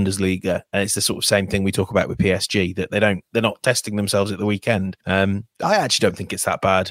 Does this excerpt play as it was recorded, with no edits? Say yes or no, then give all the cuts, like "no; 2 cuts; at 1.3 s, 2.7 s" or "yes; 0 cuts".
no; 2 cuts; at 3.3 s, 5.0 s